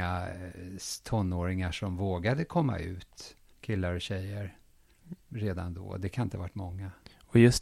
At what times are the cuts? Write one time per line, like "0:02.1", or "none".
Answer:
0:03.5